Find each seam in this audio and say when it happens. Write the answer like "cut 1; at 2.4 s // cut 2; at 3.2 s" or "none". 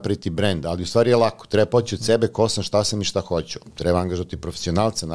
none